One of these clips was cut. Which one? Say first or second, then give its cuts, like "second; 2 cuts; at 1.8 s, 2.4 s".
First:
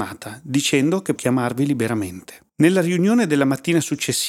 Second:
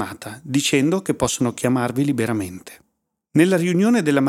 first; 2 cuts; at 1.2 s, 2.5 s